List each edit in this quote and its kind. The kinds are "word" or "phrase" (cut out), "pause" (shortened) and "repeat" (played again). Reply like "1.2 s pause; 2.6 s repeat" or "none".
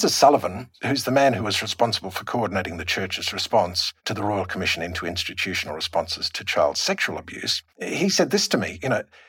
4.0 s pause; 7.7 s pause